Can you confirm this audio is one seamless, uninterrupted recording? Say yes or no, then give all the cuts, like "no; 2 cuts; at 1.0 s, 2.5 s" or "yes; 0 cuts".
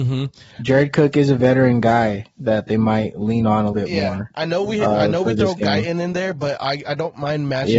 no; 1 cut; at 3.7 s